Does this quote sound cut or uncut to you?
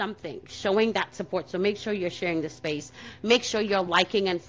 uncut